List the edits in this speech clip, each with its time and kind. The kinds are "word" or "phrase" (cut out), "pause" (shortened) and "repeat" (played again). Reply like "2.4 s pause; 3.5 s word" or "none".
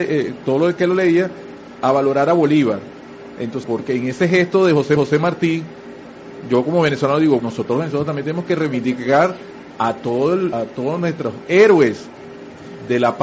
3.6 s word; 5.0 s repeat; 7.4 s word; 10.5 s word